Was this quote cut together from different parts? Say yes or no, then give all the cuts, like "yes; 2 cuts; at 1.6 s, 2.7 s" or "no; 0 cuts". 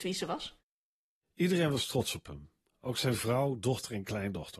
no; 0 cuts